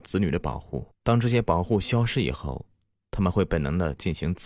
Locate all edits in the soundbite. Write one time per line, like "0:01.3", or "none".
0:00.9